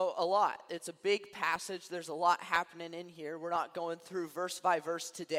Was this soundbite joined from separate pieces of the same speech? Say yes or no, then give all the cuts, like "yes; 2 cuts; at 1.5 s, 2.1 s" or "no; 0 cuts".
no; 0 cuts